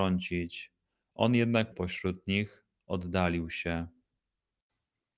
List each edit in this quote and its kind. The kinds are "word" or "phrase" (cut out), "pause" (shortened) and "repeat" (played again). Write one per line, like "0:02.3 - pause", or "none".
0:01.7 - word

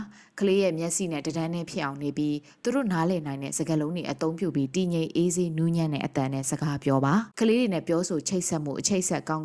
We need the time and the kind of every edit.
0:07.3 - pause

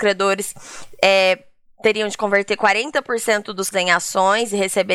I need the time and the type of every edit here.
0:03.7 - word

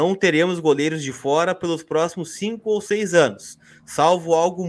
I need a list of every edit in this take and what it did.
none

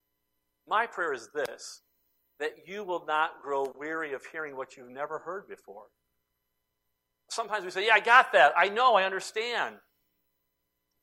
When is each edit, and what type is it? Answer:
none

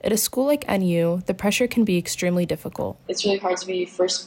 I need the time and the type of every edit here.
none

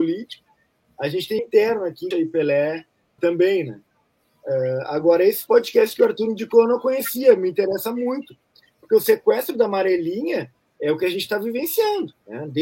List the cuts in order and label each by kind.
0:01.4 - word
0:02.1 - word
0:03.2 - word

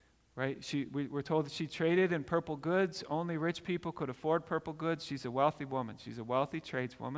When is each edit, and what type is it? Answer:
none

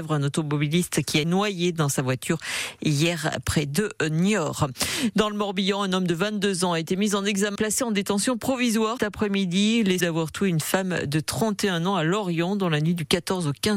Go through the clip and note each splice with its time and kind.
0:01.2 - word
0:07.6 - word
0:09.0 - word
0:10.0 - word

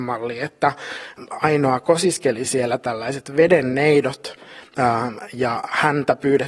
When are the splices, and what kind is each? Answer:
none

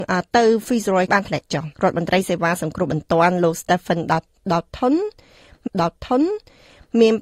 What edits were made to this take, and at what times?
0:01.1 - word
0:01.7 - pause
0:05.7 - repeat

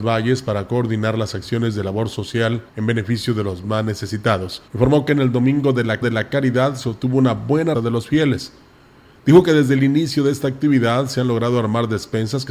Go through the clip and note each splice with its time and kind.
0:02.7 - pause
0:04.7 - pause
0:06.0 - repeat
0:07.7 - word

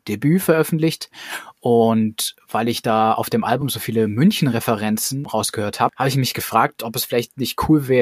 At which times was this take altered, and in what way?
none

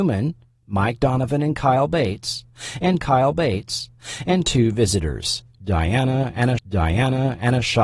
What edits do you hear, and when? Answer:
0:03.0 - repeat
0:06.6 - repeat

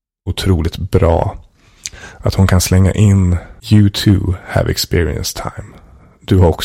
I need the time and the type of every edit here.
0:03.6 - pause

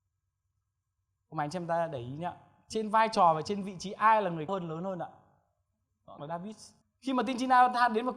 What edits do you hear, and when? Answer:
0:04.5 - word
0:06.2 - word
0:06.8 - pause

